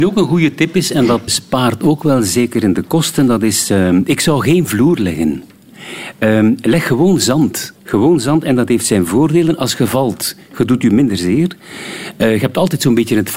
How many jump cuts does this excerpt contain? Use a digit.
2